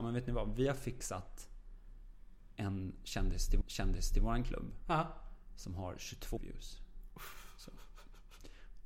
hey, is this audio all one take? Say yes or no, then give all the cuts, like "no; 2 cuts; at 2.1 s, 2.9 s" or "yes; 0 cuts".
no; 2 cuts; at 3.6 s, 6.4 s